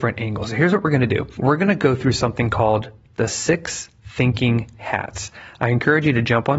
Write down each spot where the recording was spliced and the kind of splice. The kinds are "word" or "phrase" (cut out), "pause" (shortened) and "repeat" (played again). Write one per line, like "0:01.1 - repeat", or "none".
none